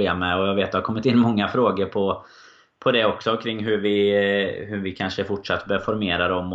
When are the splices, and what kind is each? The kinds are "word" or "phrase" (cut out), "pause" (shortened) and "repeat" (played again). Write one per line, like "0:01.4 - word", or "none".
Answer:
none